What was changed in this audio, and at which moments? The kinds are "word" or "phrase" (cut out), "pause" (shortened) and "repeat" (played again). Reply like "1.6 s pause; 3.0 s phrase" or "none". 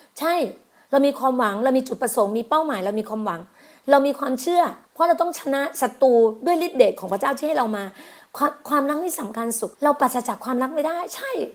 4.8 s pause; 9.7 s pause